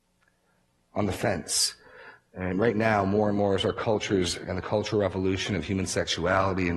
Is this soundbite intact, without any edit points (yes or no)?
yes